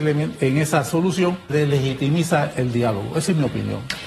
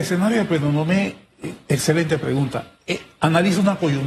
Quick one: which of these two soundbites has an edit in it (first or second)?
first